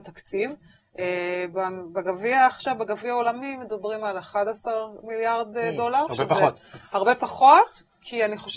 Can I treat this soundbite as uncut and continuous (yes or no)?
yes